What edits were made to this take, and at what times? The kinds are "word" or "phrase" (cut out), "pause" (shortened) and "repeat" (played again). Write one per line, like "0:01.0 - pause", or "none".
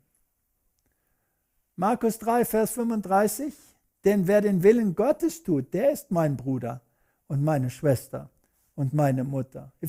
none

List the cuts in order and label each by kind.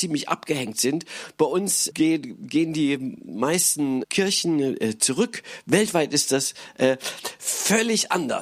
0:01.9 - word
0:04.0 - word

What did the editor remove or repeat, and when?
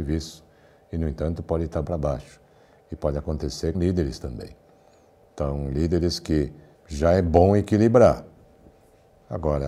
0:01.8 - phrase
0:03.7 - word
0:06.7 - word

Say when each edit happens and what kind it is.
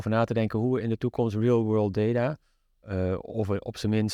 none

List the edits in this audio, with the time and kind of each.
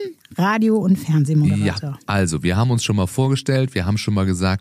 none

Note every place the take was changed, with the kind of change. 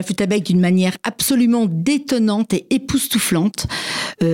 none

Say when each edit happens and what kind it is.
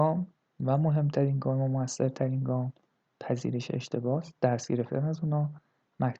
none

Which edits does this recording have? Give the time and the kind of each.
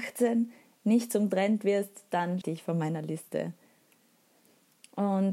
0:02.4 - phrase

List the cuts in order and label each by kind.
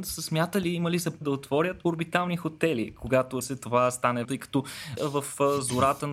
0:01.2 - word
0:01.8 - word
0:03.4 - word
0:04.2 - word
0:05.0 - word

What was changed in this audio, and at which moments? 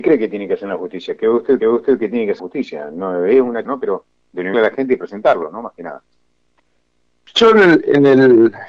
0:01.6 - repeat
0:02.4 - word
0:03.6 - phrase
0:04.5 - phrase

